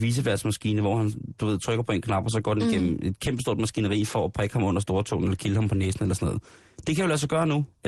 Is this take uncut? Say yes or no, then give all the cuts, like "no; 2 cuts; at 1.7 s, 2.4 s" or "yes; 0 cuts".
yes; 0 cuts